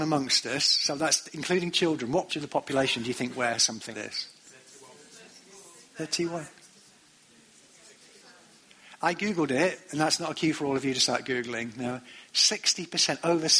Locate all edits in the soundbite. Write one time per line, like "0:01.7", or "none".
0:02.3
0:03.9

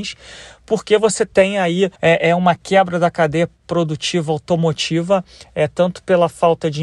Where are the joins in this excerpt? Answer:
0:02.0

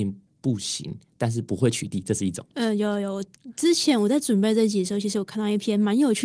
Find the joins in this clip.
0:02.5

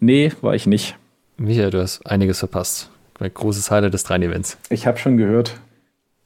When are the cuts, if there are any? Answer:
0:01.2

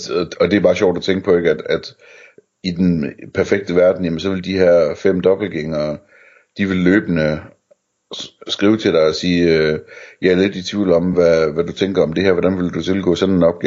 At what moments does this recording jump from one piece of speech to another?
none

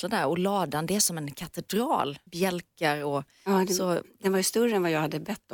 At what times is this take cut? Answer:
0:02.3

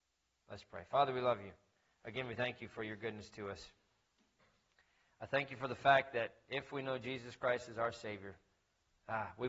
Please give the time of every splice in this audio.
none

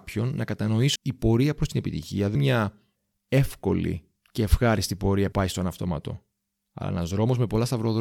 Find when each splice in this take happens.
0:01.0
0:02.4
0:05.3

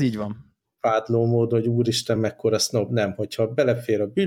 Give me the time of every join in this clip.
none

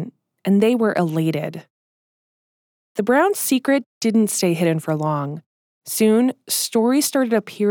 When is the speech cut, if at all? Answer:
none

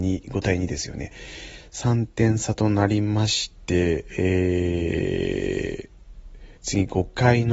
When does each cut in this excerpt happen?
0:06.6

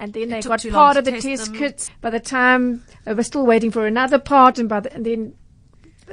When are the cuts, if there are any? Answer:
0:01.9

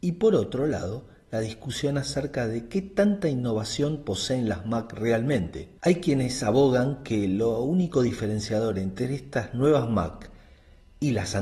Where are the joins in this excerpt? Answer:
0:05.8

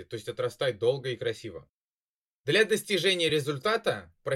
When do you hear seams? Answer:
none

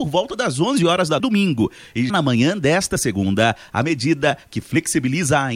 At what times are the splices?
0:01.2
0:02.1

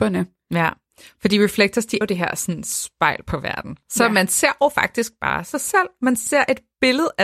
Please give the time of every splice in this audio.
0:02.0

